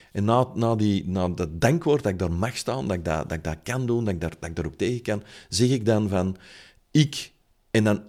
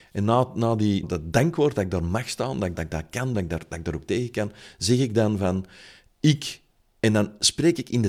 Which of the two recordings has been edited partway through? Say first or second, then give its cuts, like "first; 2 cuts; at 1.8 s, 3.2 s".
second; 3 cuts; at 1.0 s, 2.7 s, 3.3 s